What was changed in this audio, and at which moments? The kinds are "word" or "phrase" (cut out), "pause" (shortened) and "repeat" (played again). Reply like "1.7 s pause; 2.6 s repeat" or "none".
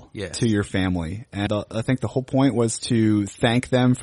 1.5 s word